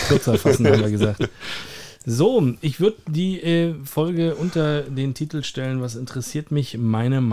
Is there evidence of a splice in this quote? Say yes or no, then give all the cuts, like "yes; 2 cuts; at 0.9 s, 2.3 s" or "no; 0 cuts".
no; 0 cuts